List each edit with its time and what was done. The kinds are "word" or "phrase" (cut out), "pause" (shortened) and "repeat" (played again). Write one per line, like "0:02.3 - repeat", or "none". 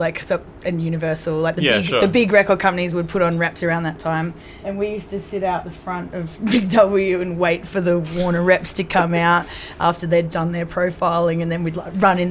0:04.6 - word
0:10.3 - word